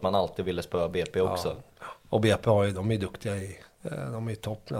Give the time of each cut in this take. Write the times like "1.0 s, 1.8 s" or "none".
none